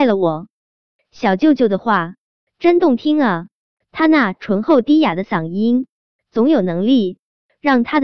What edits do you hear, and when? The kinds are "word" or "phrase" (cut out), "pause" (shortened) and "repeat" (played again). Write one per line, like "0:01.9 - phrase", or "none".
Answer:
none